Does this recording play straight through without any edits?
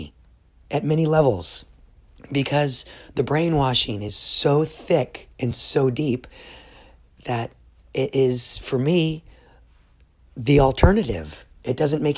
yes; 0 cuts

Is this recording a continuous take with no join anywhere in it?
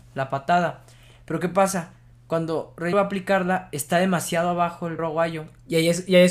no; 2 cuts; at 2.9 s, 5.0 s

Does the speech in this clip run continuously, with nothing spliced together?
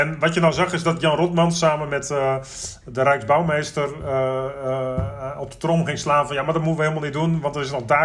yes; 0 cuts

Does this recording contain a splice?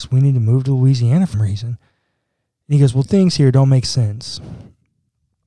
yes; 2 cuts; at 1.3 s, 3.1 s

